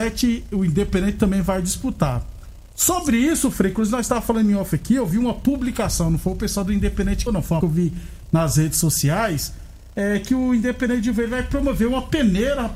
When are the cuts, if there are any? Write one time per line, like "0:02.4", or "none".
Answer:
0:02.7
0:07.3
0:07.6